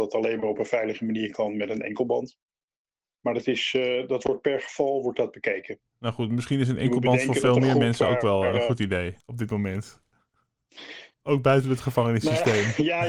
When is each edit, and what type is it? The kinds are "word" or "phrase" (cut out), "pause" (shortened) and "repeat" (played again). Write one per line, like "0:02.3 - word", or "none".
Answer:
0:05.9 - pause
0:09.2 - pause
0:11.1 - pause